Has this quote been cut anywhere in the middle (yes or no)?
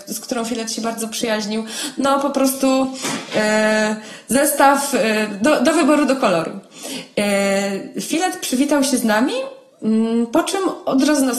no